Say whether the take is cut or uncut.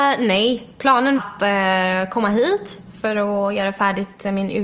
cut